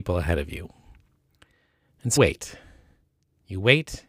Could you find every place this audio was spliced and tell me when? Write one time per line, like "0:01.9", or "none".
0:02.2